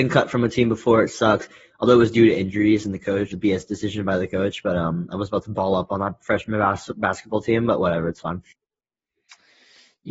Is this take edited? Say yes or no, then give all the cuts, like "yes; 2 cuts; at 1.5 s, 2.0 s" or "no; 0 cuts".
yes; 1 cut; at 3.3 s